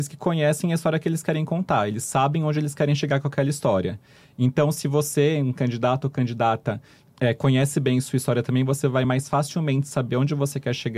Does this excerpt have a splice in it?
no; 0 cuts

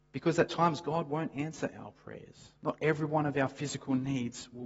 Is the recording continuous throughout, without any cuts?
no; 1 cut; at 2.6 s

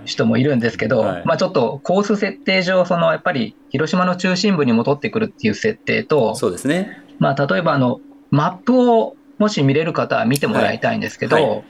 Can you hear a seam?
no; 0 cuts

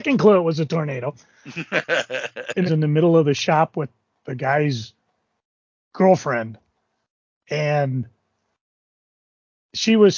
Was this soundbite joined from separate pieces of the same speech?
yes; 1 cut; at 2.7 s

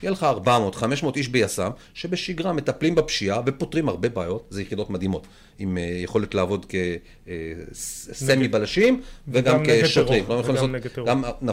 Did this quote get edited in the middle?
no; 0 cuts

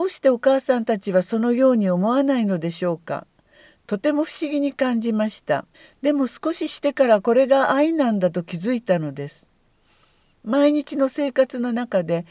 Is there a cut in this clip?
yes; 1 cut; at 5.7 s

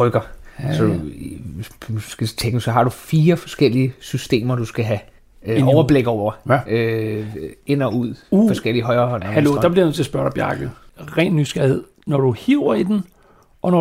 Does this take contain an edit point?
yes; 1 cut; at 5.2 s

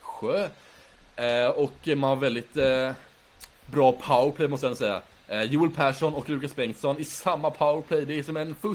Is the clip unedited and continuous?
yes; 0 cuts

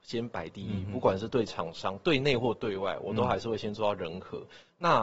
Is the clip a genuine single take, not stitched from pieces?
yes; 0 cuts

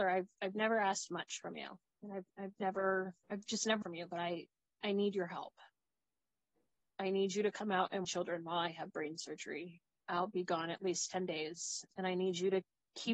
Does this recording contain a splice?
yes; 3 cuts; at 3.2 s, 3.8 s, 8.0 s

